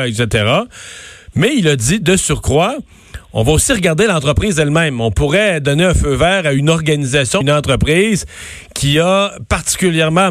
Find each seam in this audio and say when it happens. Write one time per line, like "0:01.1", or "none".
0:07.4